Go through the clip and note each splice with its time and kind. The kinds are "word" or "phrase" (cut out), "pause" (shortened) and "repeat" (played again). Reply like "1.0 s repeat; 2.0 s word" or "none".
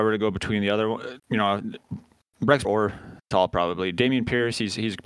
1.2 s word; 2.6 s word; 3.3 s word